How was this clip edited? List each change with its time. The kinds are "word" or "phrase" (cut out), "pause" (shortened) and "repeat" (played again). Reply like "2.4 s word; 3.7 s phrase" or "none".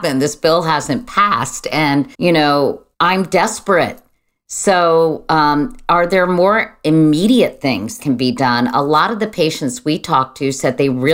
2.1 s pause; 2.9 s pause; 8.0 s word